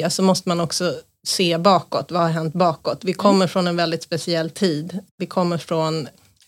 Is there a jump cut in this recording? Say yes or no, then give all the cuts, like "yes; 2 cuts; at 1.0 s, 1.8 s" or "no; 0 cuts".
no; 0 cuts